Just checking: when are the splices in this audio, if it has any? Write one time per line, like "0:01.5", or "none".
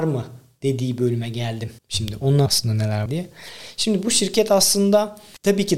0:01.8
0:02.5
0:03.1